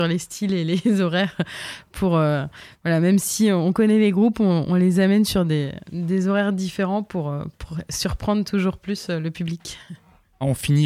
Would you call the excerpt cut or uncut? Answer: uncut